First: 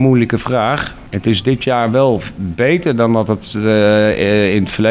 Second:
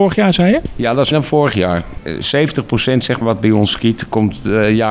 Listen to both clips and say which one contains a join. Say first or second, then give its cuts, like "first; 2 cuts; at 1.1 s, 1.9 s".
second; 2 cuts; at 1.1 s, 3.2 s